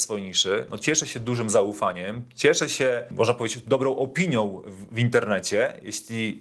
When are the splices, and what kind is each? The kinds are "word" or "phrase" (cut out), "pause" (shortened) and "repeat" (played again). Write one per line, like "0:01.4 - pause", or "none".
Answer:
none